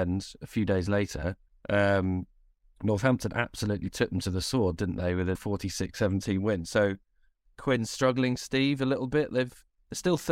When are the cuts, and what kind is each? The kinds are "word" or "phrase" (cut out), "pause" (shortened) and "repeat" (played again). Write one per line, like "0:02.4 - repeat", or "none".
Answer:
0:01.5 - pause
0:05.3 - word